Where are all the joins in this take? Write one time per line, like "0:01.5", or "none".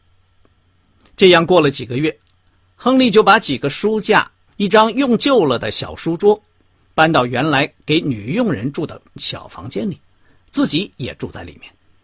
0:04.5